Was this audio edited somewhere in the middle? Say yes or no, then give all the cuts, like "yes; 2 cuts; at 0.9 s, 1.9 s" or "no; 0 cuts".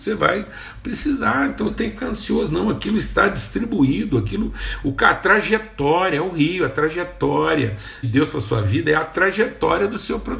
yes; 2 cuts; at 1.7 s, 8.0 s